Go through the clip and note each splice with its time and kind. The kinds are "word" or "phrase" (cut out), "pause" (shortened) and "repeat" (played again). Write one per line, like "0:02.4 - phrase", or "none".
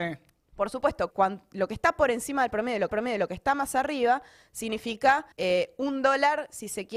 0:01.1 - word
0:02.9 - repeat
0:05.3 - pause